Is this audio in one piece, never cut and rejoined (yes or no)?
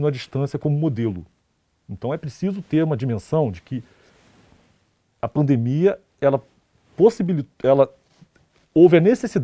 yes